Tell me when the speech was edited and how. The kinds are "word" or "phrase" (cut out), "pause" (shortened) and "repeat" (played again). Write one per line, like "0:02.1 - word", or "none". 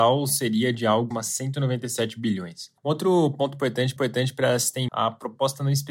0:01.1 - word
0:02.8 - pause
0:04.0 - repeat
0:04.9 - word